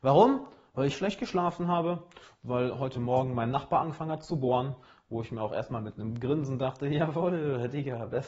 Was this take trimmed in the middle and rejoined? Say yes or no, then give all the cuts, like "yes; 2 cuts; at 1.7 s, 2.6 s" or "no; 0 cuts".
no; 0 cuts